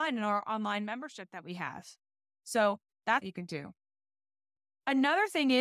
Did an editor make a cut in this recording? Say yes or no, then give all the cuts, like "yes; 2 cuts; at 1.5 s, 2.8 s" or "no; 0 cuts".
yes; 1 cut; at 3.2 s